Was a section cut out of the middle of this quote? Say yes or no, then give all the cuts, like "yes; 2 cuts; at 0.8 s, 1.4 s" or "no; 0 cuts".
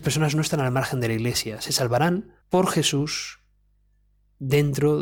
yes; 1 cut; at 2.4 s